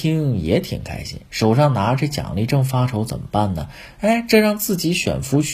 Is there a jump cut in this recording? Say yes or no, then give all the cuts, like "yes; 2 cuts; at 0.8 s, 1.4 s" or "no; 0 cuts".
no; 0 cuts